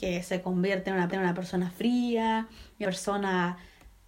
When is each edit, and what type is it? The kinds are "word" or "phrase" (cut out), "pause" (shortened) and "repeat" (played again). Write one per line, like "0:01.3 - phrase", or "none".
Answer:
0:01.1 - repeat
0:02.8 - word